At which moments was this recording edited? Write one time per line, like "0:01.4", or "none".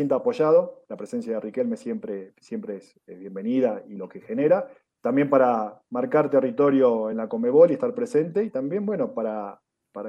none